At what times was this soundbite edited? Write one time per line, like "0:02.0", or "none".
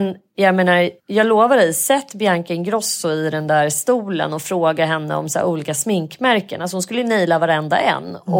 0:01.0